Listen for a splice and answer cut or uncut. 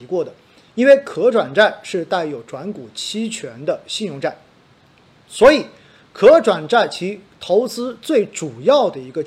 uncut